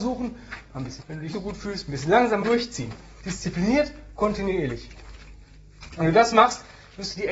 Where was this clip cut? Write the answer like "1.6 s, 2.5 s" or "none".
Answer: 1.0 s, 1.3 s, 2.4 s